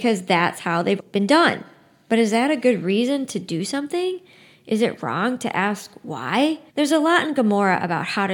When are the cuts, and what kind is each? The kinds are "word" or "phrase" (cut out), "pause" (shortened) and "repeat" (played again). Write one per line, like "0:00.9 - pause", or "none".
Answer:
0:01.0 - word
0:06.7 - pause